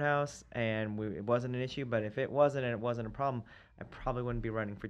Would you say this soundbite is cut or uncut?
uncut